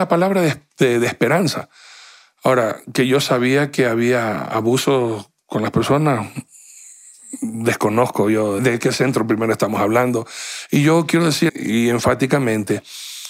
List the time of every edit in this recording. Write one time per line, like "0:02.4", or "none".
0:08.6
0:11.5